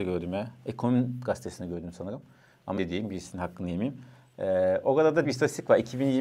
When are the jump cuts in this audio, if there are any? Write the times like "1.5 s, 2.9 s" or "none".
2.8 s, 5.2 s